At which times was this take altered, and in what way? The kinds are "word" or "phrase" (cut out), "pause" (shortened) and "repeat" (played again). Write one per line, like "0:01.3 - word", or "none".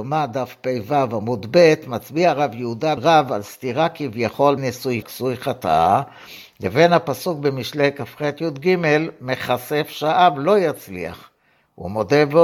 0:03.0 - phrase
0:04.6 - phrase
0:05.0 - word